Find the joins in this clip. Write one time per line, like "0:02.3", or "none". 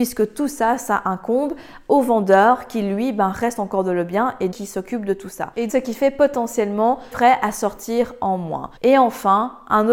0:04.5
0:05.7
0:07.1
0:08.8